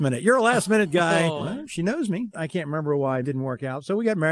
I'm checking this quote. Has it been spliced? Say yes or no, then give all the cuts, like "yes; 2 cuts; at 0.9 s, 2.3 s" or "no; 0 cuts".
yes; 1 cut; at 3.2 s